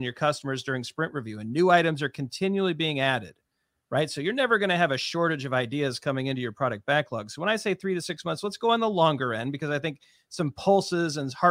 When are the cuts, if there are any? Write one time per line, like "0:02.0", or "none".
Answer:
none